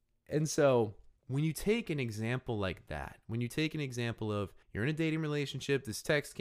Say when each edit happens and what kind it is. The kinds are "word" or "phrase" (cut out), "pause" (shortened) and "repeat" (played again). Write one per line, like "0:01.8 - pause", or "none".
0:01.2 - pause
0:04.6 - pause